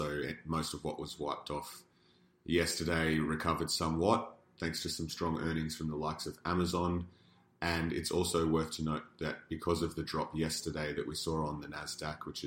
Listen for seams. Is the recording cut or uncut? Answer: uncut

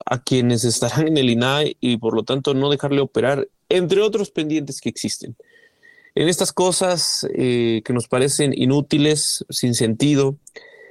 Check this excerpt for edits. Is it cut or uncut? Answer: uncut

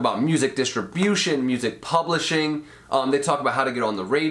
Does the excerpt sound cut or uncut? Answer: uncut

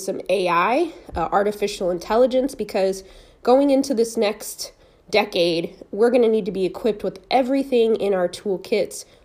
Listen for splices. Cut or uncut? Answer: uncut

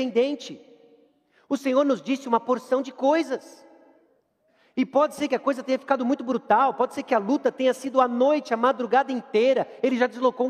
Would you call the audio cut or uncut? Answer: uncut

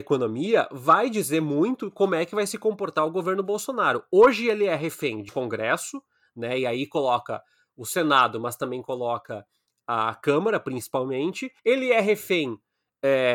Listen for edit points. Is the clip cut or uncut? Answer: cut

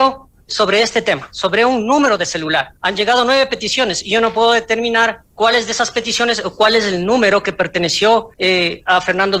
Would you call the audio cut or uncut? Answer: cut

